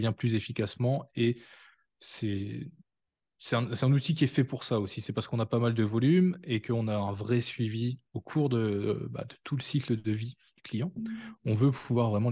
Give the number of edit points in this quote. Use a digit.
0